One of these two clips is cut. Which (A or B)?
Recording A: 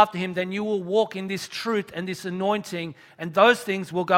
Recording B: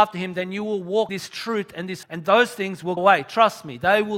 B